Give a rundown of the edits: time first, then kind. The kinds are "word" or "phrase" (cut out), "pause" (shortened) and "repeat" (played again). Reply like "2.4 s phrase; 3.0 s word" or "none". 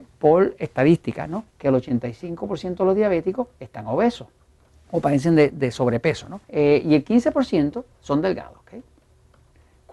1.5 s pause; 3.5 s pause; 4.4 s pause; 6.4 s pause; 7.9 s pause